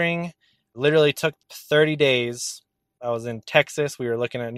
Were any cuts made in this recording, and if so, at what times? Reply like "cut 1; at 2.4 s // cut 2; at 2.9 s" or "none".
cut 1; at 1.4 s